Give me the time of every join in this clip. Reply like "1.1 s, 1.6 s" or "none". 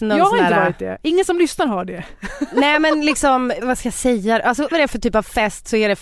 3.6 s, 4.7 s